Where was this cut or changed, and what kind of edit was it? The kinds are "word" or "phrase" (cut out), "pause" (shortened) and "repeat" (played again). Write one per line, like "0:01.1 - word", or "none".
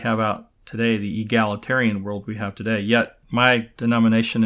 0:03.2 - pause